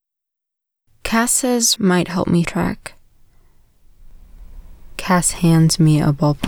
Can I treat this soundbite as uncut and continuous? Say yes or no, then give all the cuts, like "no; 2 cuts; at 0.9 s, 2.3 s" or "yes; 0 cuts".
no; 2 cuts; at 1.8 s, 2.4 s